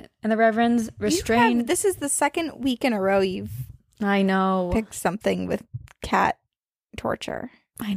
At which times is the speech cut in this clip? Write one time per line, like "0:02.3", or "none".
none